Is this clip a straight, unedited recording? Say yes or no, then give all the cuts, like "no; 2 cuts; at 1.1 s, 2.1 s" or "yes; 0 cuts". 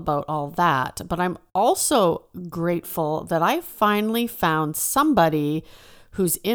yes; 0 cuts